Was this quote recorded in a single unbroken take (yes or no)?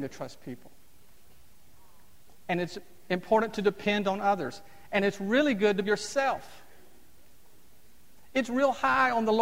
no